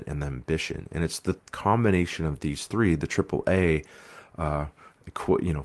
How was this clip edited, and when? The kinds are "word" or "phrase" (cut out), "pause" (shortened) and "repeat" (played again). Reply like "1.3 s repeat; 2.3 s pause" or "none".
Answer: 1.4 s pause